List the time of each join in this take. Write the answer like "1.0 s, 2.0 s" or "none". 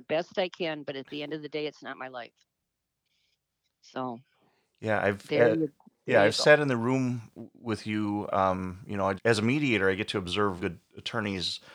9.2 s, 10.6 s